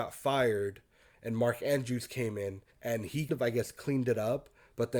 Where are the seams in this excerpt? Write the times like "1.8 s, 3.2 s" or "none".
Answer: 2.7 s, 3.3 s